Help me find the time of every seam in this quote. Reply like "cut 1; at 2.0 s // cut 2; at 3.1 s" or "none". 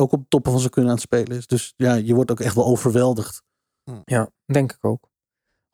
cut 1; at 4.0 s